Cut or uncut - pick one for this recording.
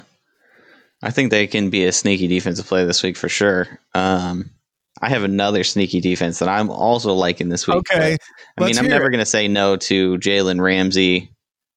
uncut